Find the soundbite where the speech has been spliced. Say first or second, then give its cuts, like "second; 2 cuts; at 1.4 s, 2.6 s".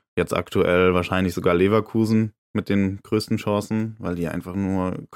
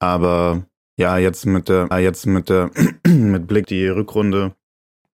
second; 2 cuts; at 1.9 s, 3.6 s